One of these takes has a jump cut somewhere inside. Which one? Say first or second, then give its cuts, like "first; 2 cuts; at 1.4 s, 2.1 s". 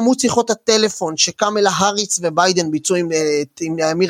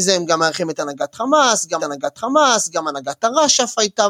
second; 1 cut; at 1.8 s